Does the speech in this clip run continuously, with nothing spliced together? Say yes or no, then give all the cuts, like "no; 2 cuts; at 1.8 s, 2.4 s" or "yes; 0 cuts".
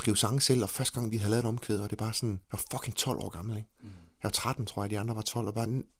no; 1 cut; at 2.4 s